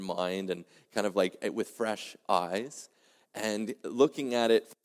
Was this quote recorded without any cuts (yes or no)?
yes